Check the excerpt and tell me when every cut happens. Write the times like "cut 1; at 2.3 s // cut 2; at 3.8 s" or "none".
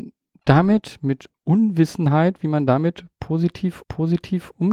cut 1; at 3.8 s

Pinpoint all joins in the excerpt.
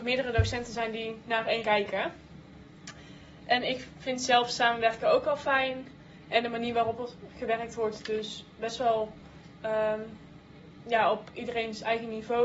cut 1; at 1.6 s

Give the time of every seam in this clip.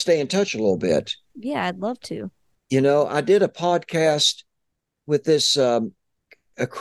none

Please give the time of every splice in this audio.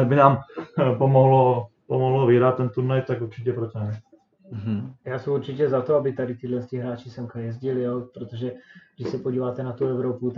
none

